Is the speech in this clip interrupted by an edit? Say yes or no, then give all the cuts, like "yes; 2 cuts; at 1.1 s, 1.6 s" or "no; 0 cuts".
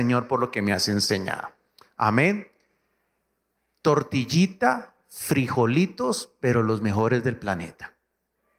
no; 0 cuts